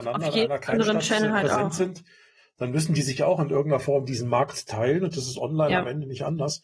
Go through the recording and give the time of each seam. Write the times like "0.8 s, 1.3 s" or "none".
none